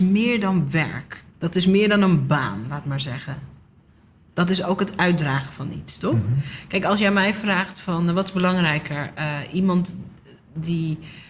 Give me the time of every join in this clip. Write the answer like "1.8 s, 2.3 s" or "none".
1.3 s